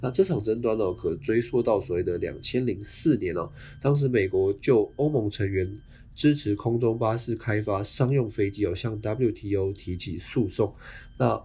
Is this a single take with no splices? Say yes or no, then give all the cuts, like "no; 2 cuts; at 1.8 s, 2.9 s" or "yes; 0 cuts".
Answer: yes; 0 cuts